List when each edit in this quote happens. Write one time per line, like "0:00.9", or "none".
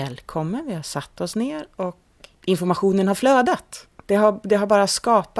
0:02.3
0:03.9

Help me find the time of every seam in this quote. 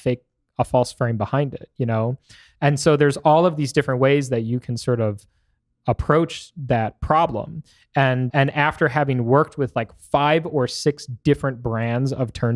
0:08.3

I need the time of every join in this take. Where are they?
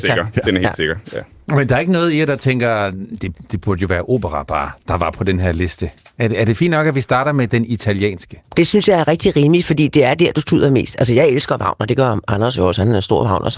none

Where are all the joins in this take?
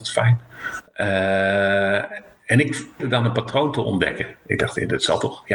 0:03.0

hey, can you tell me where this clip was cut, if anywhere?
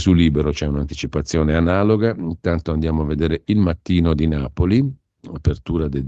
none

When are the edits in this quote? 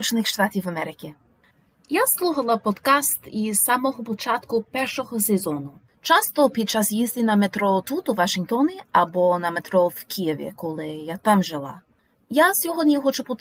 none

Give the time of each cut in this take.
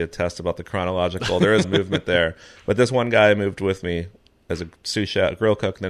0:01.6

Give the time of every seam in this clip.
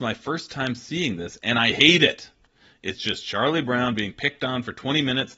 none

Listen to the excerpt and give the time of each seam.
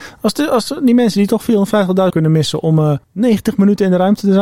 0:02.1
0:03.0

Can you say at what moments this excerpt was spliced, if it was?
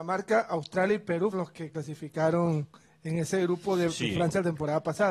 0:01.3

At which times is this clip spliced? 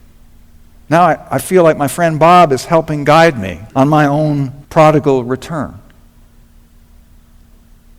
0:03.7
0:04.6

